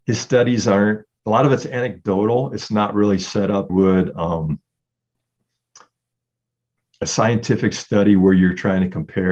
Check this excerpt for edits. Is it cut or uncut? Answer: cut